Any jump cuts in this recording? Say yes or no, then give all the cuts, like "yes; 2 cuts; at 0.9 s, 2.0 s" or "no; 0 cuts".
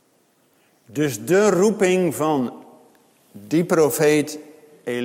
no; 0 cuts